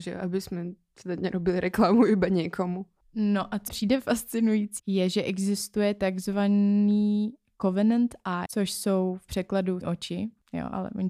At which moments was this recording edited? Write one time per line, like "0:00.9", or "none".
0:03.7
0:04.8
0:08.5
0:09.8